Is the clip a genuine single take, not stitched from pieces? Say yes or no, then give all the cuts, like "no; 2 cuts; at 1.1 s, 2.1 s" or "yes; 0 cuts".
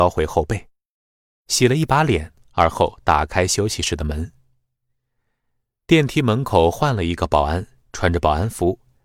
yes; 0 cuts